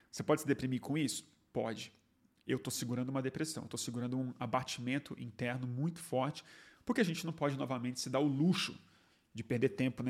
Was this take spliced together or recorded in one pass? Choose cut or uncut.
uncut